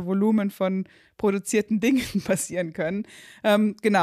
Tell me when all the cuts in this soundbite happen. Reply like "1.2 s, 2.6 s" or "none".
none